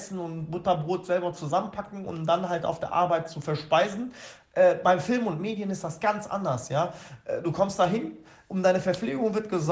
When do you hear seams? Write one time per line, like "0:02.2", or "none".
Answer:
none